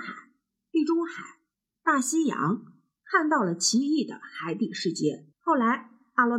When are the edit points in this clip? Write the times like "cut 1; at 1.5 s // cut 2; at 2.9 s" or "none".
cut 1; at 5.3 s